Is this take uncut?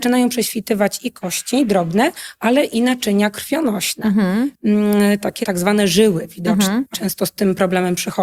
no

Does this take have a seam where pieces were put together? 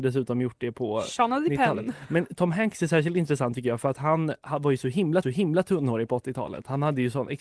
yes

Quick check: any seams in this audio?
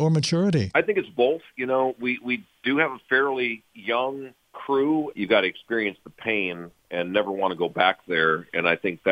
no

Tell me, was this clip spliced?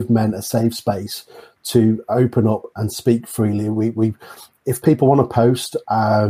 no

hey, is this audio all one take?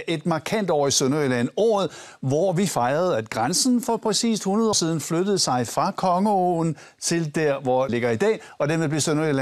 no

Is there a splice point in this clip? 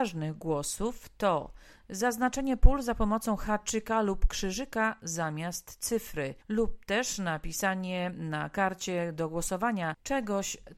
yes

